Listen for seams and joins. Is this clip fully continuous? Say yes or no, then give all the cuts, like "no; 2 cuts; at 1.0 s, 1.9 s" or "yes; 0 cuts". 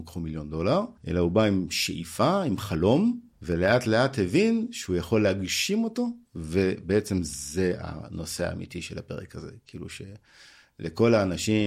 no; 3 cuts; at 1.0 s, 3.3 s, 6.3 s